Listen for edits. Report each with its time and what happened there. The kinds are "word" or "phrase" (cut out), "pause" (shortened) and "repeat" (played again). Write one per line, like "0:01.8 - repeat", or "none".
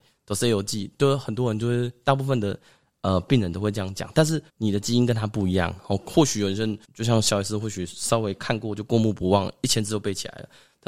0:04.5 - pause
0:06.8 - pause